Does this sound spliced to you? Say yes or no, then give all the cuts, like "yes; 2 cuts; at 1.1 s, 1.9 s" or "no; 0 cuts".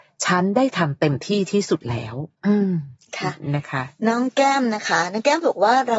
yes; 1 cut; at 2.4 s